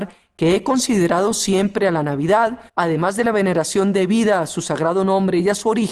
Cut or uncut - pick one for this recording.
cut